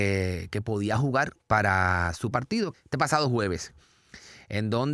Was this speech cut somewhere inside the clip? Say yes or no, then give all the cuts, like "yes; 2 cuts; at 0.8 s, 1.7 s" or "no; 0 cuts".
yes; 3 cuts; at 1.4 s, 2.3 s, 2.7 s